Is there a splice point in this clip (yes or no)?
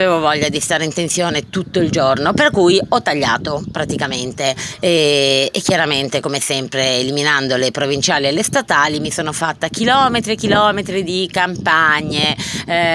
no